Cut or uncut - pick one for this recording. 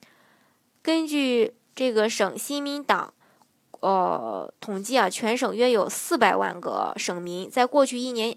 uncut